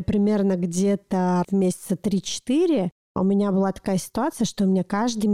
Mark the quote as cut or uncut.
cut